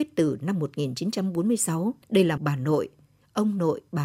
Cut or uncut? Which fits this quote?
cut